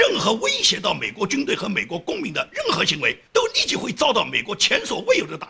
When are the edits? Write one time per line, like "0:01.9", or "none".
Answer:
0:03.3